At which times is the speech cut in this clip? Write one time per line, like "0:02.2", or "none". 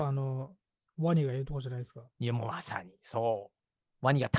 0:02.1